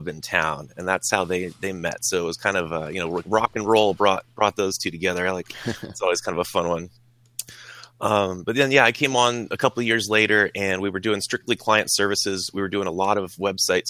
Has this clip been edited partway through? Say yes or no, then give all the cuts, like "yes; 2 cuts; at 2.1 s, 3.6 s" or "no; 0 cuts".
no; 0 cuts